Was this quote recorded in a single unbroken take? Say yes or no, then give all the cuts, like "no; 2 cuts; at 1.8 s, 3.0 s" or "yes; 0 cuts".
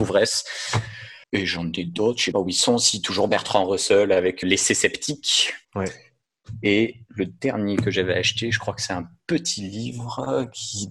no; 4 cuts; at 1.2 s, 2.3 s, 4.4 s, 5.6 s